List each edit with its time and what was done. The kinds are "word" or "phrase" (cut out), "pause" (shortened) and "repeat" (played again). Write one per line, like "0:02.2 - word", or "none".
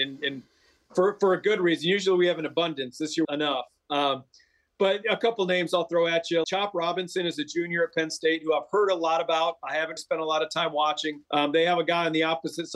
0:03.2 - phrase
0:06.4 - word
0:10.0 - word
0:11.3 - pause